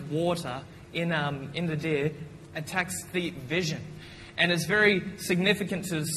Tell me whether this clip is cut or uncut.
uncut